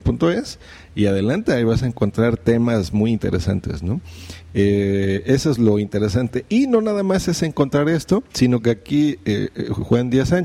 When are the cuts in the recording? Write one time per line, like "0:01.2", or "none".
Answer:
0:08.3